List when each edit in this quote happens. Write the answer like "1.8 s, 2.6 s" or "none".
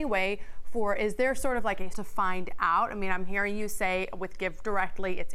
1.9 s